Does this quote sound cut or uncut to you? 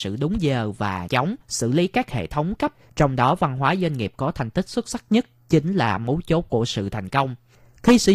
cut